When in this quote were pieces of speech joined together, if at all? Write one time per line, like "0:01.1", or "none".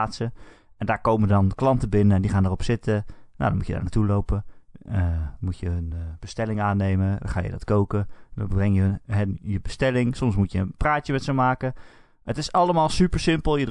none